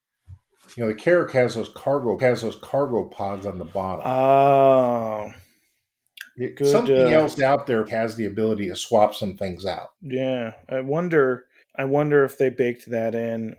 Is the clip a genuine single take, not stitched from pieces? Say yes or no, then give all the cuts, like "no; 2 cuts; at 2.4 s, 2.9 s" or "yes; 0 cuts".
no; 4 cuts; at 2.2 s, 7.9 s, 9.9 s, 11.6 s